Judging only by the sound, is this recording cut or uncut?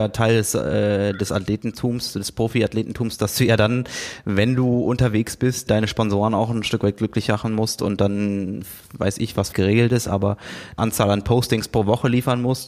cut